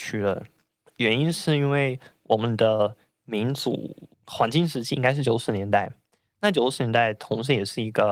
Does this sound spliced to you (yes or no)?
yes